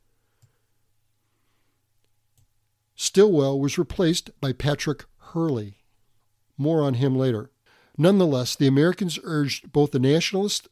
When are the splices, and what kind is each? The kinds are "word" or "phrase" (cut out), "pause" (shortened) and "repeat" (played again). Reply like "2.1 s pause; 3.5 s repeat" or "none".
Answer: 4.4 s pause; 6.2 s pause; 7.7 s pause

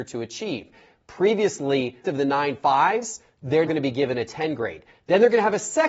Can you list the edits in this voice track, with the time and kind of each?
2.0 s phrase; 3.7 s word

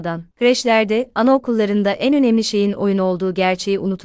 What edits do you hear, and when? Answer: none

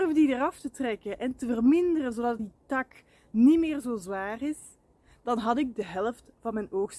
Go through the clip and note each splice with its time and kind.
2.4 s phrase

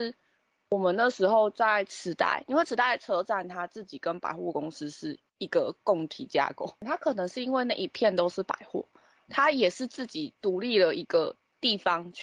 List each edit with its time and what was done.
5.3 s pause; 9.3 s word

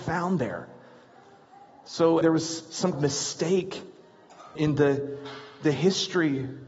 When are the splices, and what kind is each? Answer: 2.2 s word; 2.9 s word; 4.6 s word

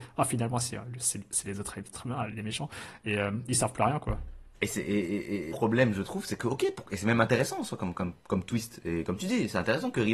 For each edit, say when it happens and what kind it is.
2.3 s word; 5.5 s phrase; 7.9 s word

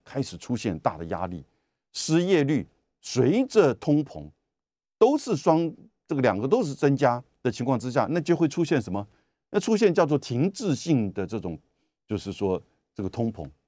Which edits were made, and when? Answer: none

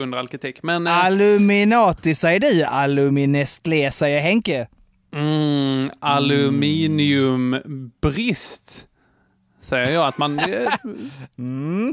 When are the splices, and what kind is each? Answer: none

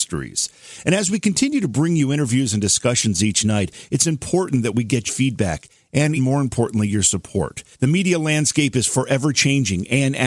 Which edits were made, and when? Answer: 5.1 s word; 6.2 s word; 7.7 s pause

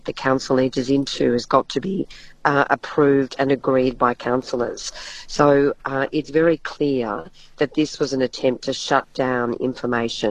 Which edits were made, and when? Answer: none

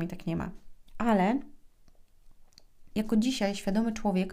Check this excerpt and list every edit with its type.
2.9 s word

